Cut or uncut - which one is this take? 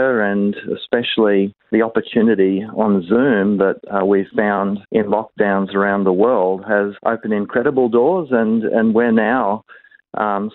cut